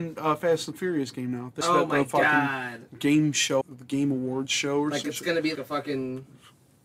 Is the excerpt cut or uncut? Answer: cut